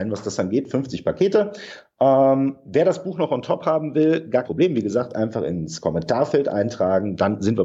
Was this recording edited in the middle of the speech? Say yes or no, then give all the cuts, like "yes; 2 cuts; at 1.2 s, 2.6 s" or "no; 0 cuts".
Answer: yes; 1 cut; at 4.4 s